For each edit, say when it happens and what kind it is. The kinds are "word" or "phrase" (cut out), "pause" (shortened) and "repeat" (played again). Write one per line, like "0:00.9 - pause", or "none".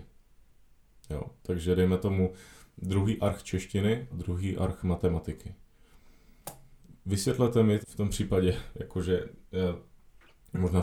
0:04.1 - word
0:06.8 - pause
0:07.8 - word